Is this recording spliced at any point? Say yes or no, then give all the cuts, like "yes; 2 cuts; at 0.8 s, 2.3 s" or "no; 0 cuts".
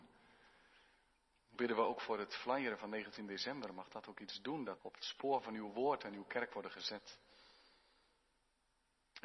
yes; 2 cuts; at 1.6 s, 4.8 s